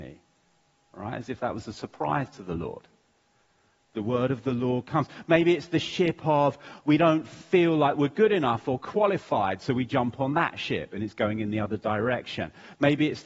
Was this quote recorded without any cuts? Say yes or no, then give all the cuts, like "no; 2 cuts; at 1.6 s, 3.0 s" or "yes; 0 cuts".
yes; 0 cuts